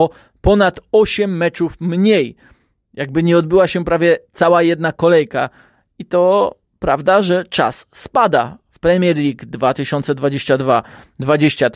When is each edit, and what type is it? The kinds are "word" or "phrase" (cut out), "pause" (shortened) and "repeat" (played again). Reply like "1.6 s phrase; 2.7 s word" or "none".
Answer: none